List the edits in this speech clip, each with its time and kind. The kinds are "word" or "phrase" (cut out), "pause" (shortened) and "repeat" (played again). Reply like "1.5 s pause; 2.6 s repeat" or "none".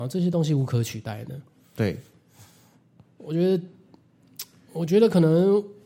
none